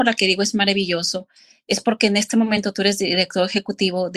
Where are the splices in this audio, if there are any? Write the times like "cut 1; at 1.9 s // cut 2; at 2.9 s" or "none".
none